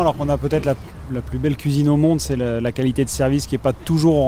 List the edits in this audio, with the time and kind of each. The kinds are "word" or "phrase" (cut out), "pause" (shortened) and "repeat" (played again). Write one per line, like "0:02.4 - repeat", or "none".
none